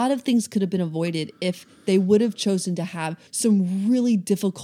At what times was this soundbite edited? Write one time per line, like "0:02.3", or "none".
0:03.3

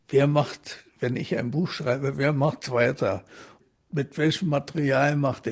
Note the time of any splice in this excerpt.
none

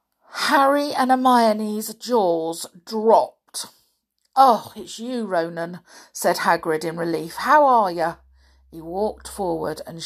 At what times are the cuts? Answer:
none

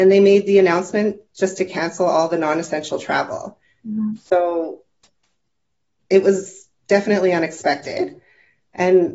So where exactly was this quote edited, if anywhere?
none

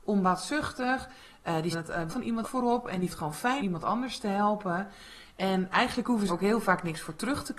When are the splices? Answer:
0:01.7
0:02.1
0:02.4
0:03.1
0:03.6
0:05.7
0:06.3

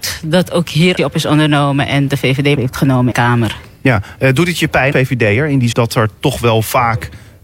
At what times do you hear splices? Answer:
0:01.0
0:02.1
0:02.5
0:03.1
0:04.9
0:05.7

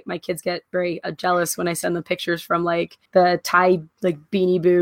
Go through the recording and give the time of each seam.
0:03.1
0:03.9

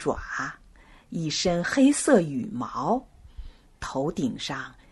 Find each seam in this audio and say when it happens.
none

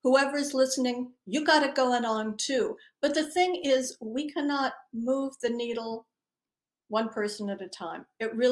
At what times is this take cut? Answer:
none

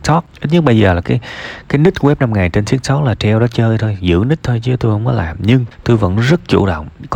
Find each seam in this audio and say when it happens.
0:01.0

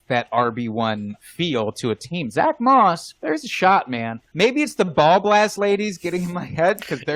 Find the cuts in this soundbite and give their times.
none

